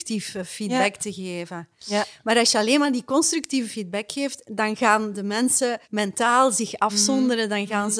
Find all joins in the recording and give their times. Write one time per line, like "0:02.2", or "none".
0:05.8

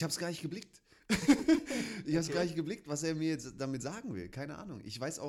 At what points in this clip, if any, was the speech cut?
none

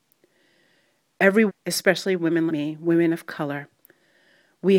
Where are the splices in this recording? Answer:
0:01.5
0:02.5

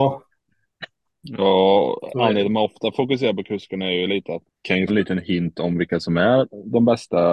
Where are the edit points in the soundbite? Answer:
0:04.5
0:04.9

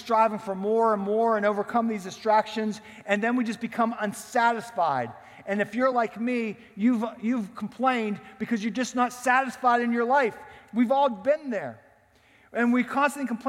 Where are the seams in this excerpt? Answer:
none

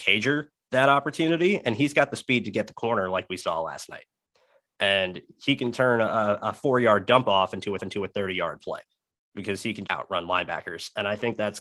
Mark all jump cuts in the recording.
0:07.8
0:09.9

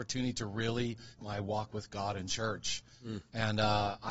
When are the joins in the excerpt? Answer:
0:01.2

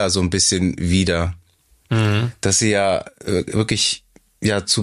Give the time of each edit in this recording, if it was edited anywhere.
none

